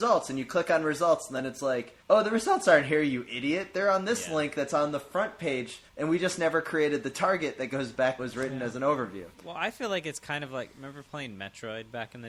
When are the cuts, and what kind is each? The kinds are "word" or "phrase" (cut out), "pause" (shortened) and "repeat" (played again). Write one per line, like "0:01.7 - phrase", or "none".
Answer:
0:02.0 - pause
0:05.9 - pause
0:08.2 - phrase
0:09.3 - pause